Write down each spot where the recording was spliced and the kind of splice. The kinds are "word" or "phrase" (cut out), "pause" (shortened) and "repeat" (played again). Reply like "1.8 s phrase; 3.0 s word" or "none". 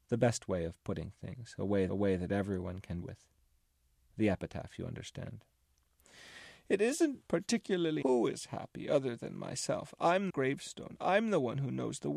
1.9 s repeat; 3.0 s phrase; 8.0 s word; 10.3 s phrase